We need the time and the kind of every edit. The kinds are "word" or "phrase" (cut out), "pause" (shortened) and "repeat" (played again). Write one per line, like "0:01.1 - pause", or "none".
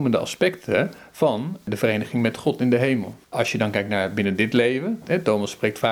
0:03.2 - pause